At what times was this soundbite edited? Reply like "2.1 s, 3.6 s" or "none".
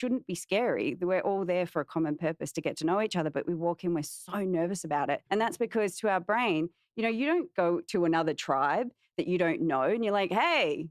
5.3 s